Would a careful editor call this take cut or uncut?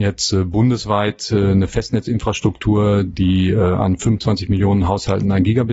uncut